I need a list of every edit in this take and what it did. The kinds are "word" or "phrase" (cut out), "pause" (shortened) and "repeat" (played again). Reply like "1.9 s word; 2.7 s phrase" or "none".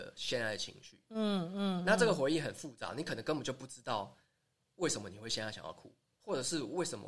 none

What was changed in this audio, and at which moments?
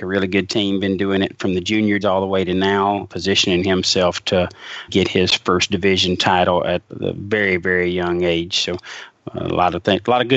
2.0 s word; 3.1 s word; 4.9 s word; 6.9 s word

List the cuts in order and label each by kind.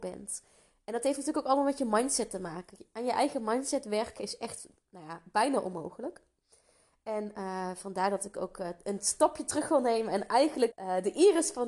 10.7 s word

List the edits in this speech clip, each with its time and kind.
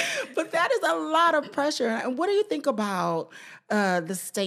none

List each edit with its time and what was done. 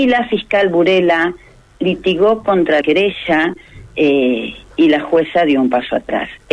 2.8 s word

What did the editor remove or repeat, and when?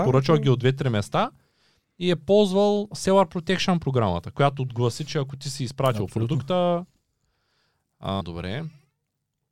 8.2 s word

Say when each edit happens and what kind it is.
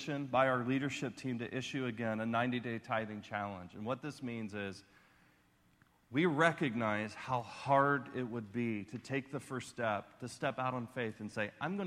none

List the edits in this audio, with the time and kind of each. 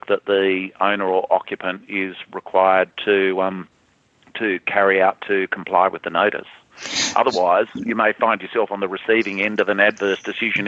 none

